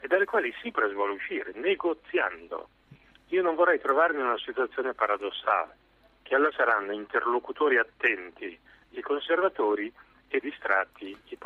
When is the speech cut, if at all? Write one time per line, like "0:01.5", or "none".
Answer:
0:06.5
0:10.4